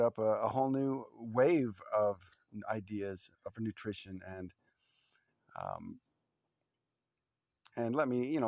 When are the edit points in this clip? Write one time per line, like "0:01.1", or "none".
0:03.3